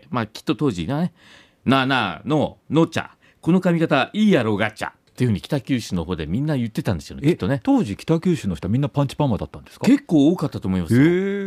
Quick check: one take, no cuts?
yes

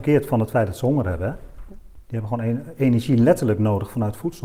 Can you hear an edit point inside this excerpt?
no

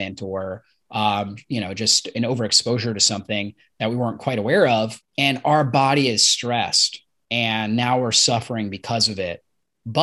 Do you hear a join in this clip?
yes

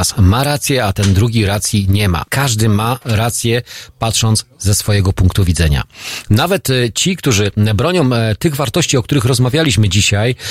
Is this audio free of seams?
no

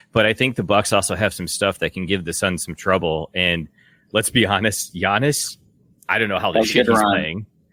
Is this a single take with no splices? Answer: yes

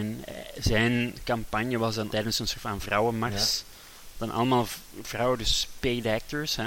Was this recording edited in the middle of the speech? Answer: yes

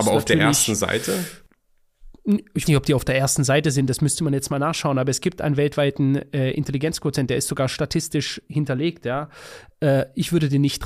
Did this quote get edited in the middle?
yes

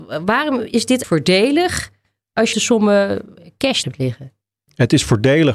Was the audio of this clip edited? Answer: yes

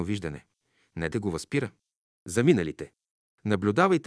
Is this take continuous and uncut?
no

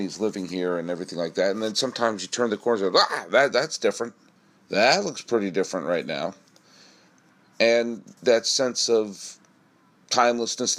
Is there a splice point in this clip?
yes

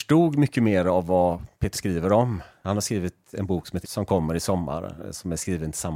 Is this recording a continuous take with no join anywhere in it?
no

